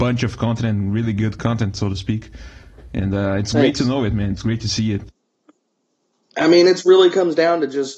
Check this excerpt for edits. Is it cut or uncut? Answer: uncut